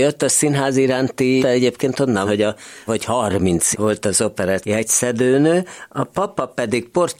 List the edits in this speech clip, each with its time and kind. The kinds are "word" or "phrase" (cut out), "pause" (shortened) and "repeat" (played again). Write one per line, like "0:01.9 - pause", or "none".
0:01.4 - word
0:02.2 - word
0:02.9 - word
0:03.7 - word
0:04.6 - word